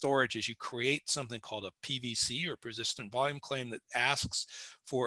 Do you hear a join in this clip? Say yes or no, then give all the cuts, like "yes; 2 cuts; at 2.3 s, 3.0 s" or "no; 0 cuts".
no; 0 cuts